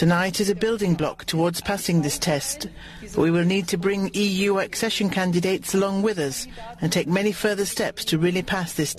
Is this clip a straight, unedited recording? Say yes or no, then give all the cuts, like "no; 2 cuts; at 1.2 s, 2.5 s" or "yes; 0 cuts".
yes; 0 cuts